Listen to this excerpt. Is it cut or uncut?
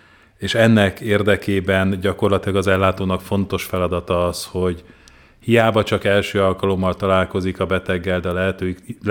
uncut